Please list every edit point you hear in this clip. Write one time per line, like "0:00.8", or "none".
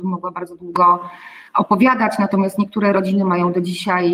0:01.5